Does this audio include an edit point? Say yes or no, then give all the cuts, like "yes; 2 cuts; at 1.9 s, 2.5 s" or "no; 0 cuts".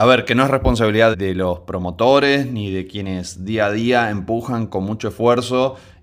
yes; 1 cut; at 1.1 s